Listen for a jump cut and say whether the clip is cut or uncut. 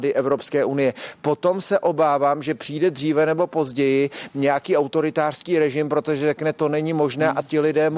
uncut